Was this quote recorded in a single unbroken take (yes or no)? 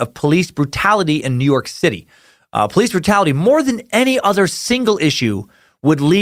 yes